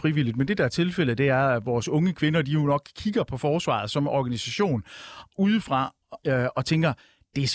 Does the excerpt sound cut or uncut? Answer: cut